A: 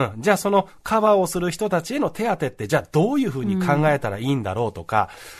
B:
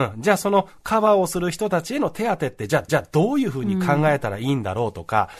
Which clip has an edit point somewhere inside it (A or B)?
B